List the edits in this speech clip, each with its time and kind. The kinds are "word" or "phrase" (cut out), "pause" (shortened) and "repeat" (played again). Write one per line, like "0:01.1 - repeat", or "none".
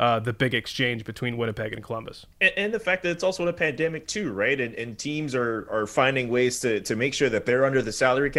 0:02.3 - pause

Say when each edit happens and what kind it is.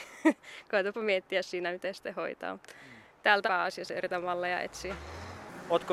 0:03.5 - phrase

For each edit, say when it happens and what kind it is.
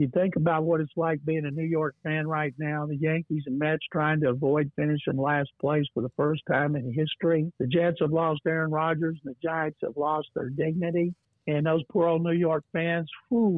0:07.5 - pause
0:11.2 - pause

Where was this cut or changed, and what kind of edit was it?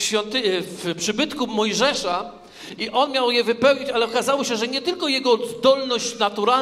none

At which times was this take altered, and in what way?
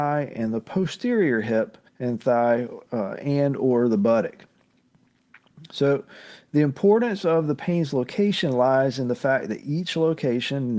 0:01.9 - pause

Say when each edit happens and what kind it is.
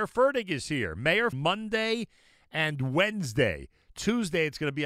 0:01.3 - phrase

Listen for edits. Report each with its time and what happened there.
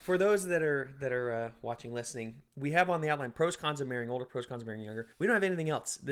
0:05.1 - pause

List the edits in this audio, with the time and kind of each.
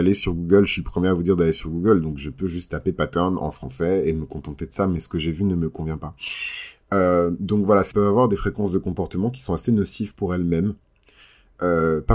0:07.9 - phrase

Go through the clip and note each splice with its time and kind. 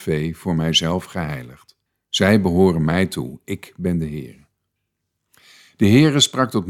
0:01.9 - pause

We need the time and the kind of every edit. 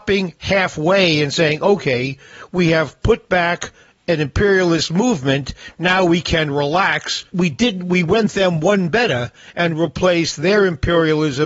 0:07.3 - pause

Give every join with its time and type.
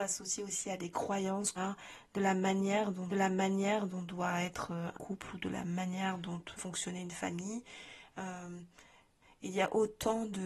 0:01.6 - word
0:03.1 - repeat
0:04.9 - word
0:06.6 - word

